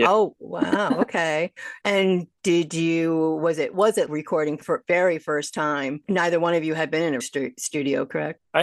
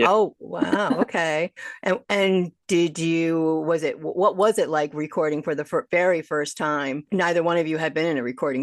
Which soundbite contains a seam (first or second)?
first